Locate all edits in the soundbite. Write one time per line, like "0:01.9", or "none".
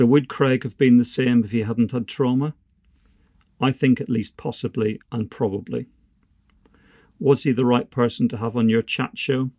0:05.0